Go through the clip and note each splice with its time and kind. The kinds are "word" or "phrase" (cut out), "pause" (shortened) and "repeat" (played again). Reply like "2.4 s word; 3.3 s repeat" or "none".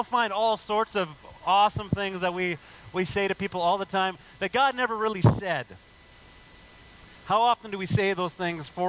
none